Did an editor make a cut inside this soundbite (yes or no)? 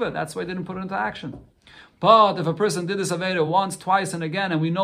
no